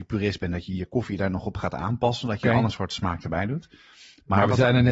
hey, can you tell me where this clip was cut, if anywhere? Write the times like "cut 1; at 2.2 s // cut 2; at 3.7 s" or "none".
none

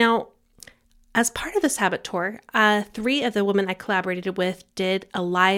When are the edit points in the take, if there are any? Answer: none

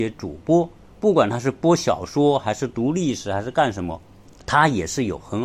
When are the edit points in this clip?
cut 1; at 4.2 s

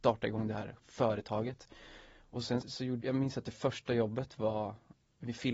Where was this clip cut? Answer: cut 1; at 2.6 s // cut 2; at 3.0 s

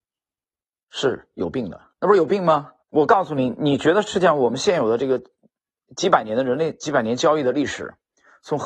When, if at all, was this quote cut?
cut 1; at 1.9 s // cut 2; at 2.8 s

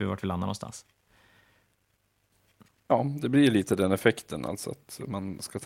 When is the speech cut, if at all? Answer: none

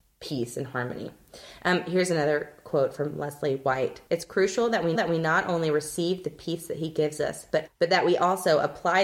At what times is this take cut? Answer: cut 1; at 4.1 s // cut 2; at 4.9 s // cut 3; at 7.7 s

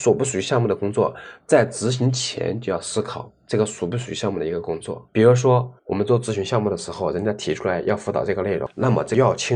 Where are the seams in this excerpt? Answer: cut 1; at 5.1 s // cut 2; at 5.8 s

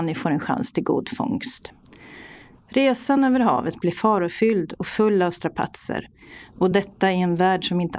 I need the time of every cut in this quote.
none

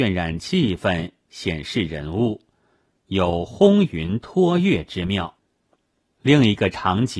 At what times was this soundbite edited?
none

